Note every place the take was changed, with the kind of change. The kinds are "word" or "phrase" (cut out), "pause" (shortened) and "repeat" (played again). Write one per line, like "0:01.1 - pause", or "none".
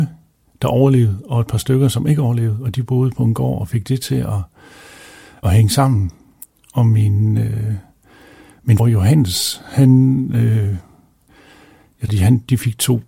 0:05.4 - word
0:08.8 - word
0:12.1 - word

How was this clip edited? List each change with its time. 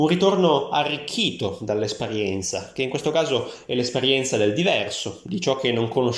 none

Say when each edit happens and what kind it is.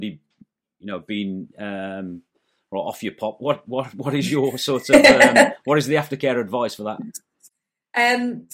0:03.4 - word

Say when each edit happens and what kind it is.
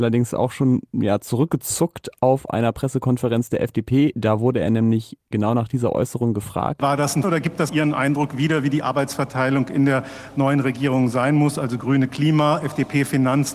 0:07.2 - word
0:07.7 - word

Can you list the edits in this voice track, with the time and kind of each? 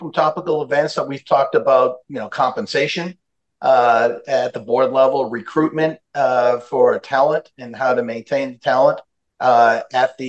none

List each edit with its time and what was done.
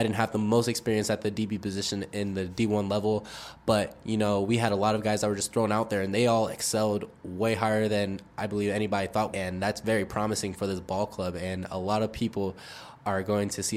0:09.3 - phrase

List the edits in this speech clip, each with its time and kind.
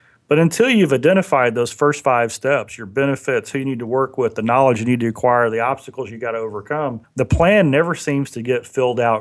0:07.0 - pause

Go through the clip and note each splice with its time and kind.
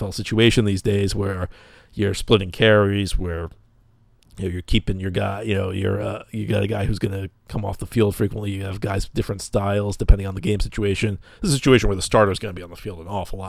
none

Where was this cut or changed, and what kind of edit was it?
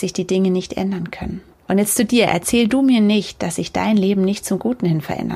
0:01.5 - pause

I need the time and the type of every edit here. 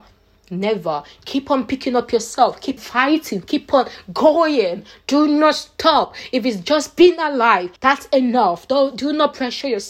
0:02.8 - word
0:07.8 - pause

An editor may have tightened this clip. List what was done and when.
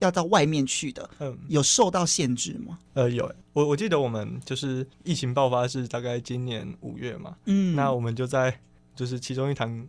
0:01.1 - pause
0:04.9 - pause

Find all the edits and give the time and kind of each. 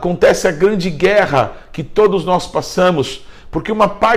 none

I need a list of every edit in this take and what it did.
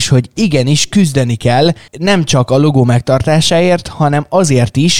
0:01.9 - pause

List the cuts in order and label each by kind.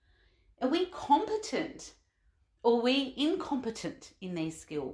none

